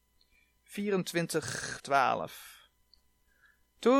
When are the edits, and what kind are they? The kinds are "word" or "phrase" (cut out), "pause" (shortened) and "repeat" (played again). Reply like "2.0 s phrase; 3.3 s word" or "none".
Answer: 1.8 s word